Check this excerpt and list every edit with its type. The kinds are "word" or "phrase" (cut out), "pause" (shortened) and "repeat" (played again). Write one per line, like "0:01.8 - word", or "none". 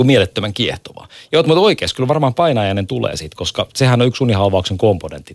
none

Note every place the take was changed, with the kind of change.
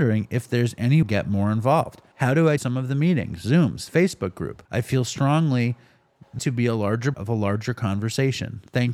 0:01.0 - phrase
0:02.1 - pause
0:02.6 - word
0:04.7 - pause
0:06.4 - word
0:07.1 - word

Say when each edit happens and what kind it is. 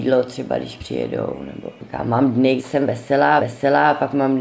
0:02.6 - word
0:03.4 - repeat

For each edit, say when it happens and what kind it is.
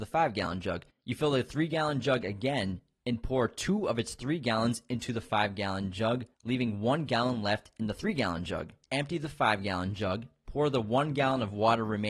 0:06.3 - pause
0:08.8 - pause

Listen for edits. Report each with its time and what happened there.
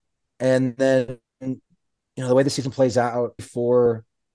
0:03.4 - word

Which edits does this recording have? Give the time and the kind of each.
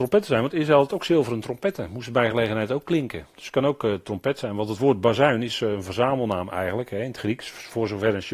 none

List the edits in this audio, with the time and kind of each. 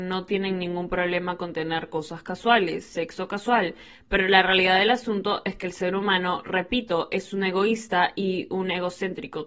none

